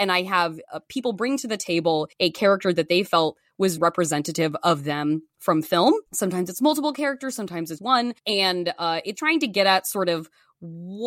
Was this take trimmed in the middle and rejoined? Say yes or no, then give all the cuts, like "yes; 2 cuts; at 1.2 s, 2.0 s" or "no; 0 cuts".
yes; 6 cuts; at 2.1 s, 3.8 s, 6.1 s, 7.8 s, 8.2 s, 9.2 s